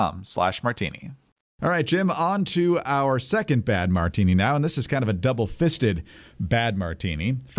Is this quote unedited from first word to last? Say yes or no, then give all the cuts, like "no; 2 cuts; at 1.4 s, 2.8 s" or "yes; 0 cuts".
no; 1 cut; at 1.4 s